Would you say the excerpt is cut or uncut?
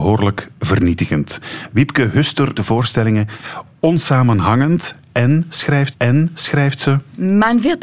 cut